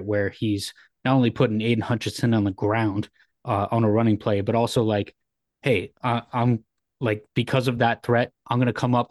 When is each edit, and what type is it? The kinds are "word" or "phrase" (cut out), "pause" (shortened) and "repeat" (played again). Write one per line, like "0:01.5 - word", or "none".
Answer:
none